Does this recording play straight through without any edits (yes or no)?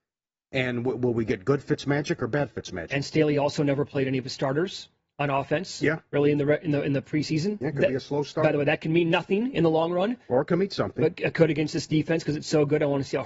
yes